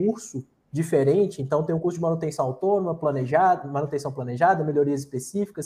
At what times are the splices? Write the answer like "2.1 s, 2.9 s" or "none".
none